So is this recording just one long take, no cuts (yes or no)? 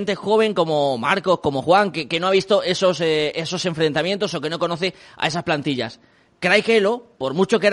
yes